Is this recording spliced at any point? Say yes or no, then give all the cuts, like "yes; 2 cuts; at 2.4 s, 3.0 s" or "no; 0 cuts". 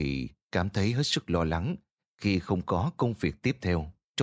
no; 0 cuts